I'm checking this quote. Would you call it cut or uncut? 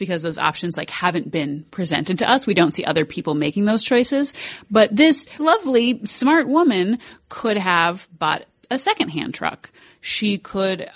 cut